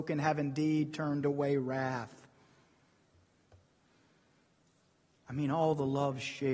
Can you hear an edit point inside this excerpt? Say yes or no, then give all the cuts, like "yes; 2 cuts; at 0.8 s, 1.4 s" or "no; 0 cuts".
no; 0 cuts